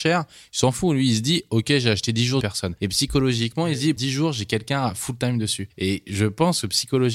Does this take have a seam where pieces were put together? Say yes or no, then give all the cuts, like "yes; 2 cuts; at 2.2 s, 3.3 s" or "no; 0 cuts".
yes; 2 cuts; at 2.4 s, 4.0 s